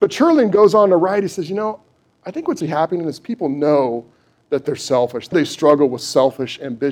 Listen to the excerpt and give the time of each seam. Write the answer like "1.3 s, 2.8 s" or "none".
2.6 s, 5.3 s

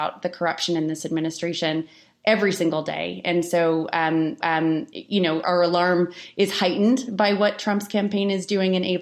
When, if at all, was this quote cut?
4.4 s, 5.4 s

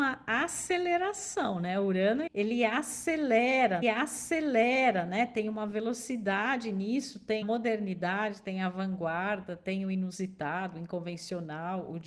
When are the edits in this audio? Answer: 2.3 s, 3.8 s, 7.4 s

